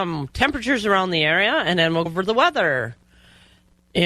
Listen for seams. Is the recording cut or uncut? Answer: cut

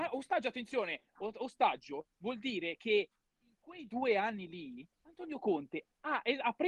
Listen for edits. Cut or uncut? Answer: cut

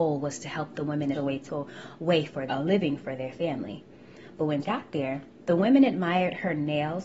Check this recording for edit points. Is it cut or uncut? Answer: cut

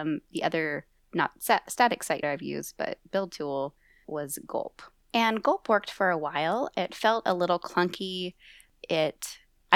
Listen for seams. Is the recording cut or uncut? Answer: cut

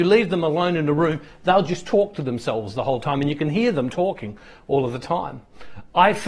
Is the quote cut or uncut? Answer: uncut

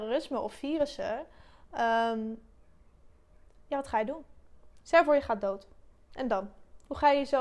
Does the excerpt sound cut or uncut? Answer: uncut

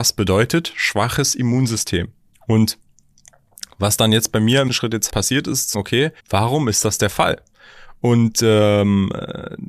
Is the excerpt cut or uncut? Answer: cut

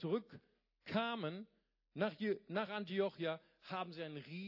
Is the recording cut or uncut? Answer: uncut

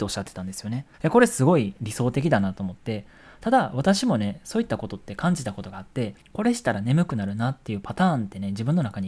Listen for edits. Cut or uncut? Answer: cut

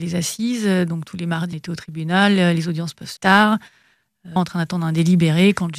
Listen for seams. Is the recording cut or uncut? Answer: cut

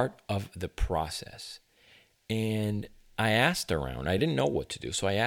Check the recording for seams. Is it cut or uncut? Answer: uncut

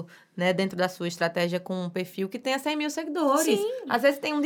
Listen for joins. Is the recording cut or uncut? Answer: uncut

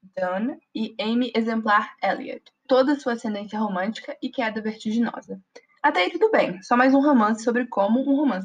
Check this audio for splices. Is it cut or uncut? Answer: cut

